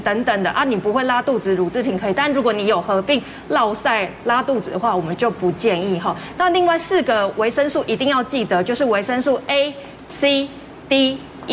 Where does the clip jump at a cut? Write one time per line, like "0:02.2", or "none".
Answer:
none

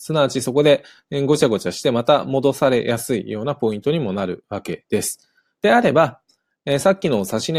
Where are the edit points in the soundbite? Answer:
none

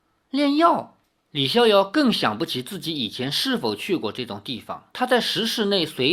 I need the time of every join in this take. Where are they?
0:04.9

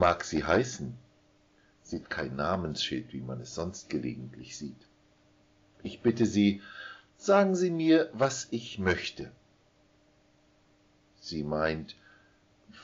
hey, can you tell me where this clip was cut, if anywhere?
0:02.0

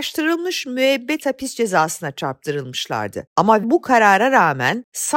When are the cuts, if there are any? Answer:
0:03.6

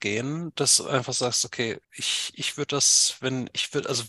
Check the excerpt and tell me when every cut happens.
0:01.8

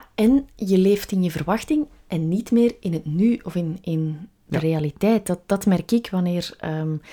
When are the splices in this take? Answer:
none

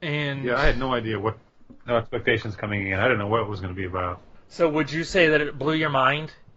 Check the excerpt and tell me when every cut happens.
none

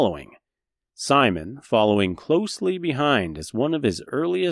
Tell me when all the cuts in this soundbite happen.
none

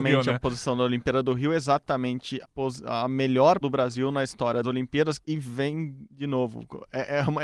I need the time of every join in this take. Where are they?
0:02.4
0:03.6
0:04.6
0:05.2

